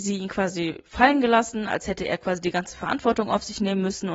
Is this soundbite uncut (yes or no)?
yes